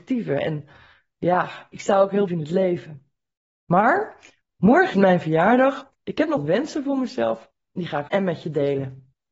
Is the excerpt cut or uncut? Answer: cut